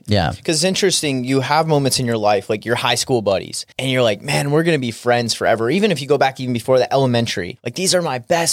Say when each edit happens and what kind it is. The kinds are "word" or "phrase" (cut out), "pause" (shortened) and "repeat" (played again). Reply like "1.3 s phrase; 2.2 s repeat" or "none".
3.7 s pause